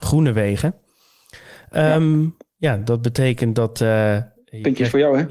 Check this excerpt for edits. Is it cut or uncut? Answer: uncut